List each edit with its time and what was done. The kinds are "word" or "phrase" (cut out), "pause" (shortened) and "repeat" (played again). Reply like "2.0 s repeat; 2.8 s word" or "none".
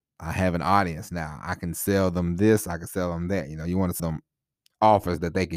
4.0 s word